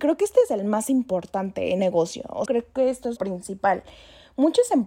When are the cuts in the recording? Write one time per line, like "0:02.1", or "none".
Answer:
0:01.8
0:02.5
0:03.2